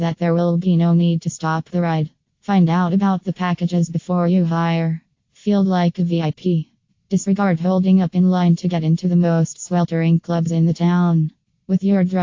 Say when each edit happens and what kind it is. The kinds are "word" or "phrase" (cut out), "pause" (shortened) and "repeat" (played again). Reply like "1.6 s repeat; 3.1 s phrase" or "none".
none